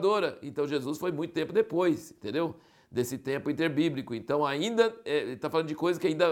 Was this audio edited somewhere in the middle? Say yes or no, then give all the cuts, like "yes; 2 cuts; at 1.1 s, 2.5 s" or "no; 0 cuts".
no; 0 cuts